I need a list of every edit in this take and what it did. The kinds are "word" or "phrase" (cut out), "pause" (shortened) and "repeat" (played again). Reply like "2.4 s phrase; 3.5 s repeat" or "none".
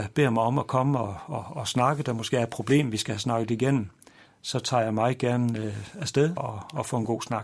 6.4 s word